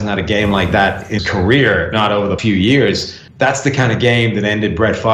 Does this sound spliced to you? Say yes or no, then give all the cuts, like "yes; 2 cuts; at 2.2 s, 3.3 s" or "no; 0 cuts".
yes; 4 cuts; at 1.2 s, 1.9 s, 2.4 s, 3.3 s